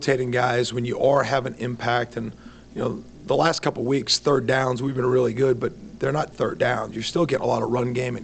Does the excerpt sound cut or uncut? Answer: cut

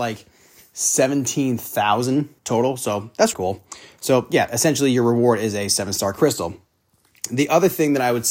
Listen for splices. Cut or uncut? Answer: cut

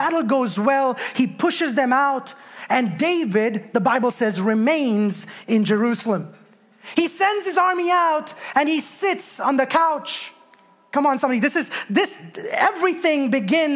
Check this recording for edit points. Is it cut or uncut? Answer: uncut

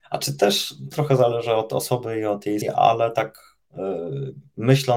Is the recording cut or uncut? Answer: cut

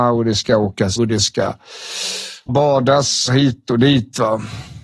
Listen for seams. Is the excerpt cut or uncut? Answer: cut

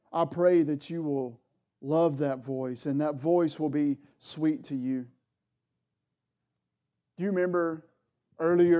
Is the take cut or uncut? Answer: uncut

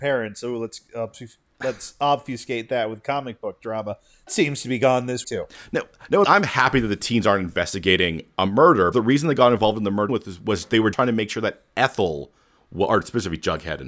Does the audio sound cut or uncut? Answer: cut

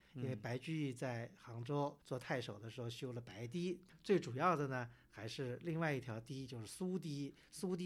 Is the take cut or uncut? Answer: cut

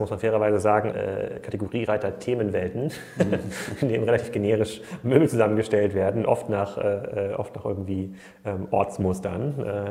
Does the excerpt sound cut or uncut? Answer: cut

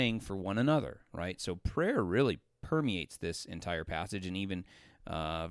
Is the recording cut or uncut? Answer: uncut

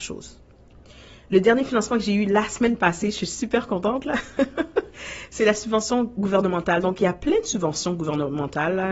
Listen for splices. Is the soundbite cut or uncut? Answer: uncut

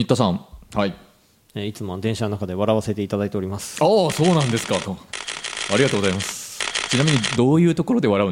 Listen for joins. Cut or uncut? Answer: uncut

